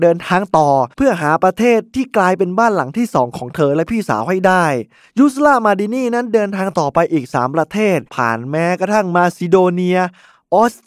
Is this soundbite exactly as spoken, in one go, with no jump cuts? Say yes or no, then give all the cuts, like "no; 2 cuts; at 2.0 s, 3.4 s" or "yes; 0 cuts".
no; 3 cuts; at 0.9 s, 5.0 s, 8.1 s